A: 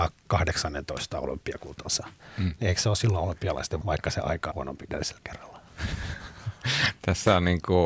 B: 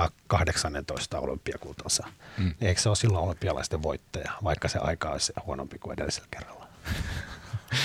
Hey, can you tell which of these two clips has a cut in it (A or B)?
A